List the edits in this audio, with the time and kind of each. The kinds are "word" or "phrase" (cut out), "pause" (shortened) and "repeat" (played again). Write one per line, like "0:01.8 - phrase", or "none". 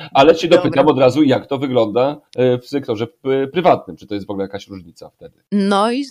0:02.3 - pause

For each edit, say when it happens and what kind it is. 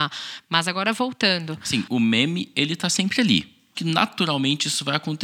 0:03.7 - word

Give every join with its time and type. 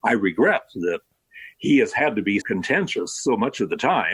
0:02.4 - word

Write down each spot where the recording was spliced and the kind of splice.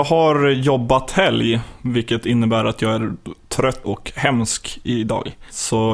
0:03.8 - word

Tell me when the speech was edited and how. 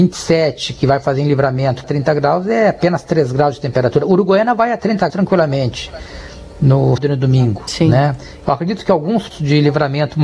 0:01.8 - word
0:05.1 - word
0:07.0 - word
0:09.3 - word

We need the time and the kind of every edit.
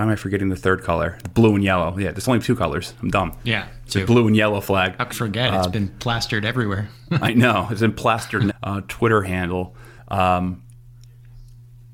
0:03.9 - word
0:05.1 - word
0:08.5 - phrase
0:10.0 - pause

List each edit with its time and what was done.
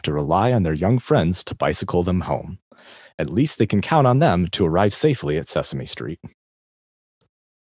none

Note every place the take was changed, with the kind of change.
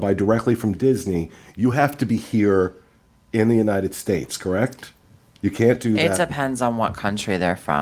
none

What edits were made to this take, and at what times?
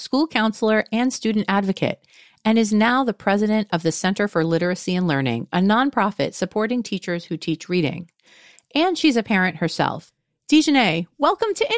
none

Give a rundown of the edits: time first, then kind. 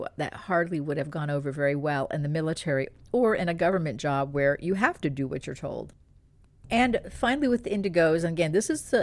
none

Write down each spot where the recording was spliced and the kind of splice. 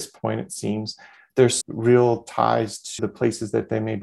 0:01.6 - word
0:03.0 - word

